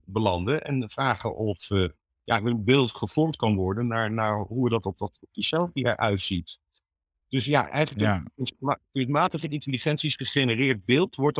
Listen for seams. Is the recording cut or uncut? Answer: uncut